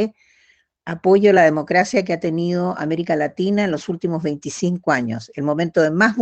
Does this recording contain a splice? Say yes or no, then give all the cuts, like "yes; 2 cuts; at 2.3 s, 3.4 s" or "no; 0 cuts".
no; 0 cuts